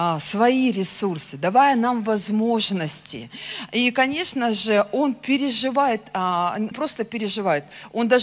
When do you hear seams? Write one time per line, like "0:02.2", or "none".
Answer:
0:06.7

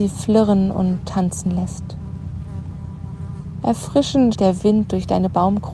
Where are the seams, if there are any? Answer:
0:04.3

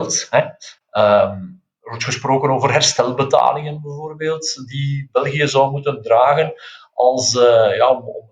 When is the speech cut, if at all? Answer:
none

